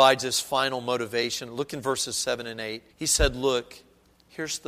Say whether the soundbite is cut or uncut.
cut